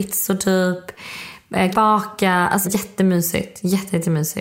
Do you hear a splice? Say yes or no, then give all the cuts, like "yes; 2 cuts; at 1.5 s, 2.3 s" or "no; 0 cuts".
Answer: yes; 2 cuts; at 1.7 s, 2.6 s